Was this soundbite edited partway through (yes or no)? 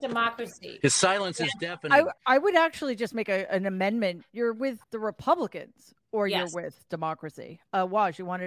yes